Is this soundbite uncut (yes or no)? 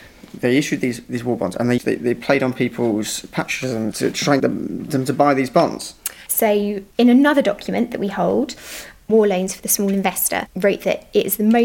no